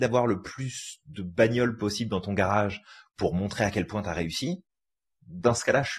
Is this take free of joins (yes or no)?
yes